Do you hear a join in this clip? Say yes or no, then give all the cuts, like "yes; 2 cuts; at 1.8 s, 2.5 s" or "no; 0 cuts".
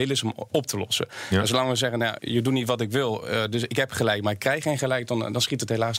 yes; 1 cut; at 2.2 s